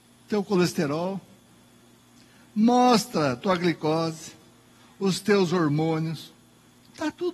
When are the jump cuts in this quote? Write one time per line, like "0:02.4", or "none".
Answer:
none

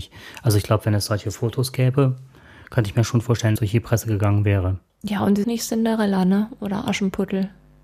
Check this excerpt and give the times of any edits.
0:03.6
0:05.4

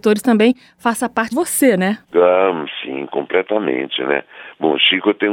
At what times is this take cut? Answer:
0:01.3
0:02.0

